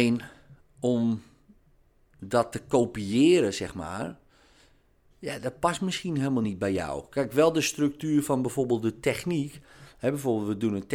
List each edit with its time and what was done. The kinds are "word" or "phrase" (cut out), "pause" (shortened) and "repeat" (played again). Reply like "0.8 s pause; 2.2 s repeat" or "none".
none